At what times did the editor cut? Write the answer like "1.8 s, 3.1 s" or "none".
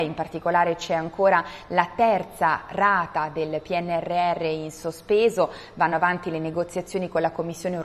none

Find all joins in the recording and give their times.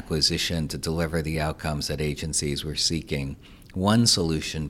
none

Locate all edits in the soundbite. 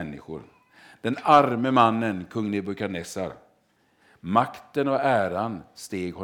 none

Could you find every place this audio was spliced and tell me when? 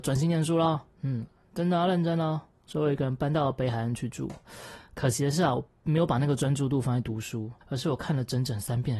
0.9 s, 7.6 s

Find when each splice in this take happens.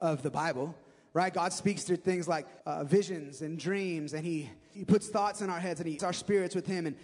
2.6 s, 4.7 s, 6.0 s

